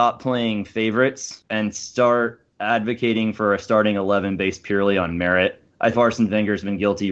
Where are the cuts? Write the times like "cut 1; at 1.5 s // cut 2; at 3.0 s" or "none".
cut 1; at 5.9 s